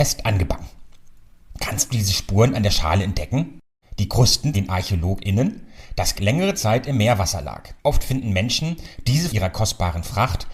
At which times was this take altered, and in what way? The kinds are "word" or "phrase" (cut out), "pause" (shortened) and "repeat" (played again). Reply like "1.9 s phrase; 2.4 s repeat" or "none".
3.8 s pause; 4.5 s word; 6.2 s word; 7.8 s pause; 9.3 s phrase